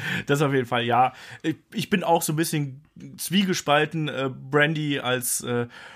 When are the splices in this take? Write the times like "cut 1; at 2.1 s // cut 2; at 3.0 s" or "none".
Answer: none